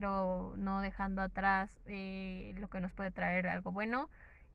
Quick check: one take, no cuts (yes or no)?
yes